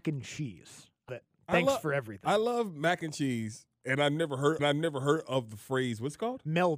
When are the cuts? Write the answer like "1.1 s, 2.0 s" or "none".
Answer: 1.1 s, 4.6 s